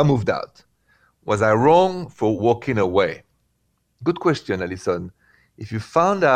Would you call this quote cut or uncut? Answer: uncut